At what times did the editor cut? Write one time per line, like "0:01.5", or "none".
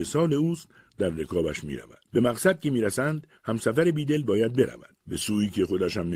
0:02.1
0:03.4
0:05.0